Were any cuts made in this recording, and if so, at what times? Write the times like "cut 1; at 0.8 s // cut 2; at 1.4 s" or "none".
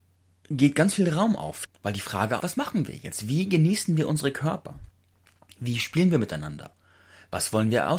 cut 1; at 1.6 s // cut 2; at 2.4 s